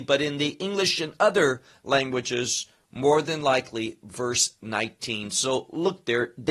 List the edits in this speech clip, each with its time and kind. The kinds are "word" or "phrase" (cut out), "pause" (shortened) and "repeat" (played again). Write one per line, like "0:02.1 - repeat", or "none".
none